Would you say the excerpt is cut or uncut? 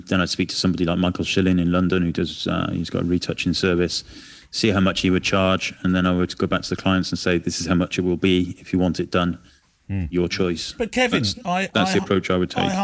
uncut